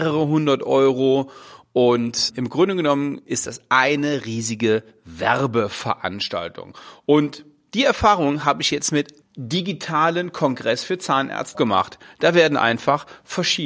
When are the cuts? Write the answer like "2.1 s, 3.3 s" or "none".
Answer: 2.3 s, 9.2 s, 11.5 s

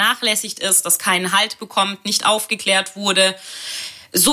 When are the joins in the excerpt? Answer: none

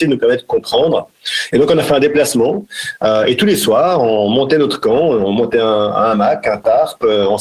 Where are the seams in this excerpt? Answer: none

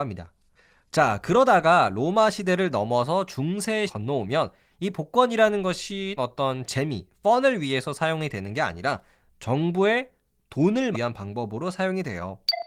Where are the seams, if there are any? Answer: 3.9 s, 6.2 s, 10.9 s

